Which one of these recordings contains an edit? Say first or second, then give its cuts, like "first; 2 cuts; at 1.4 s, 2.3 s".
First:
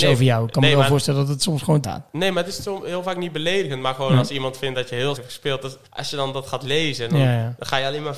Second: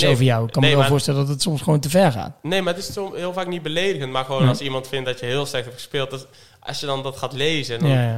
first; 3 cuts; at 1.8 s, 5.2 s, 5.9 s